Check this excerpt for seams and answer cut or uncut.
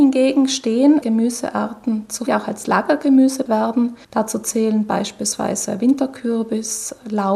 cut